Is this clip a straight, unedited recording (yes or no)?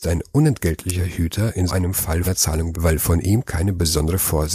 no